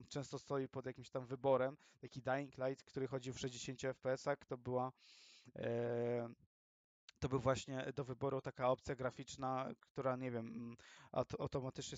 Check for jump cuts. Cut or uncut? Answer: uncut